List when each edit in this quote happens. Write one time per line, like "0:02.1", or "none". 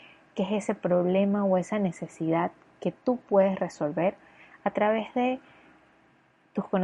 none